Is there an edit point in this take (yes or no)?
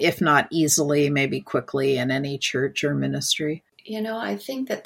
yes